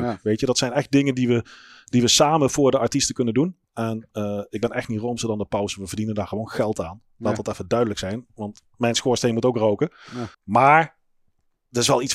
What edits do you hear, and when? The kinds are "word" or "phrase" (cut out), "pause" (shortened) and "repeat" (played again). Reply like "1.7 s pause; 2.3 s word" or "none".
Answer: 3.6 s pause; 10.3 s pause